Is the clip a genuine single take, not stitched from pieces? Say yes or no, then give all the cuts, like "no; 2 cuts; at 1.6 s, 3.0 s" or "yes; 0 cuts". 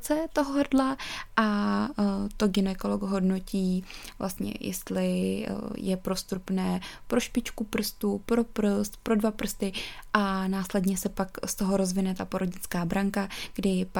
yes; 0 cuts